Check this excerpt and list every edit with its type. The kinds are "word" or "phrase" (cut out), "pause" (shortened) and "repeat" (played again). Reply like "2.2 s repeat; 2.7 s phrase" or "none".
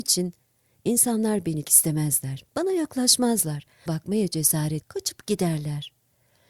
1.6 s word; 2.5 s pause; 3.9 s word; 4.8 s word

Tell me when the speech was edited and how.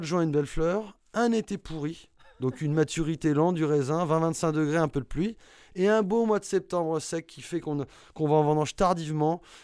none

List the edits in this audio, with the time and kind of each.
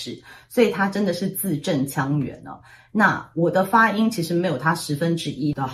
none

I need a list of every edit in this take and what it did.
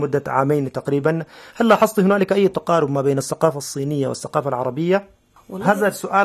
none

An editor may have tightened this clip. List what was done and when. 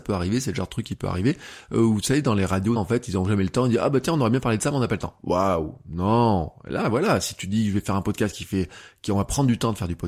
2.8 s phrase

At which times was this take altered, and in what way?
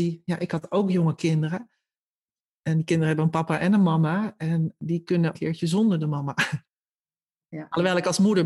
5.3 s phrase

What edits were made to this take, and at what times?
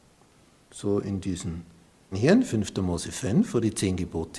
2.1 s word

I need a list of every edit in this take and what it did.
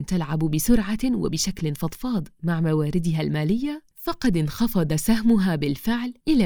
none

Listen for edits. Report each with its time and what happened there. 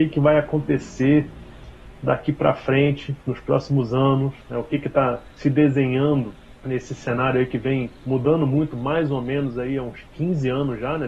4.4 s pause; 5.3 s pause; 6.6 s pause; 8.0 s pause

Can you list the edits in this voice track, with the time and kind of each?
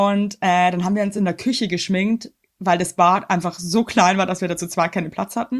none

